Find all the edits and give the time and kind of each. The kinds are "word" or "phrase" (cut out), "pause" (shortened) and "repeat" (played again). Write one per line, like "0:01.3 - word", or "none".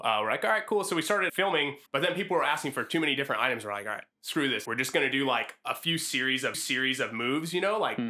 0:01.3 - word
0:01.9 - pause
0:04.1 - pause
0:04.6 - word
0:06.5 - repeat